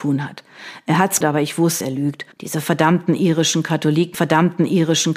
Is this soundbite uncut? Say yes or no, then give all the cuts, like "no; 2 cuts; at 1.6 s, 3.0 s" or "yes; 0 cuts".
no; 4 cuts; at 1.2 s, 1.8 s, 2.3 s, 4.1 s